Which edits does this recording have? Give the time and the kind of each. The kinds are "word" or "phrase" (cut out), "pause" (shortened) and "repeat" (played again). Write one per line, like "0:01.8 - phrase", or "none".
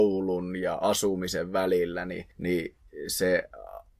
0:02.3 - pause